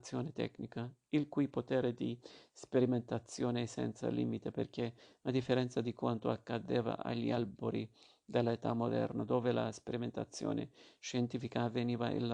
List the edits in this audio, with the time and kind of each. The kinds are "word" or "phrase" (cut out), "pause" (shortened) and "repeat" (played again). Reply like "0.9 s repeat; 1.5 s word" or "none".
none